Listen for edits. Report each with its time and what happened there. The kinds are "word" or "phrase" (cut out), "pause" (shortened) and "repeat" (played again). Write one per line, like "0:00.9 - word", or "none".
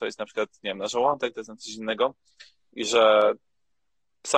none